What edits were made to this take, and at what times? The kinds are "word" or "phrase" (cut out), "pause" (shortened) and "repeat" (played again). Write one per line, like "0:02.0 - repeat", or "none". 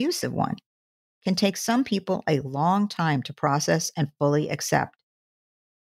none